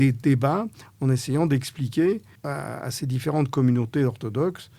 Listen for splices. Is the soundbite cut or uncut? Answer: cut